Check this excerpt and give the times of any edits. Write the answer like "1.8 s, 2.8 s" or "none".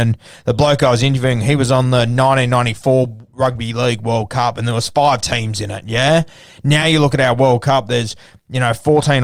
none